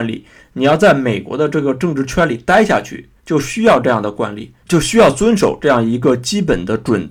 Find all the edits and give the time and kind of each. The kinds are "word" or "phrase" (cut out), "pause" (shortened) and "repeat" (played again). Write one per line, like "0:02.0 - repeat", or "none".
0:03.2 - pause
0:04.6 - pause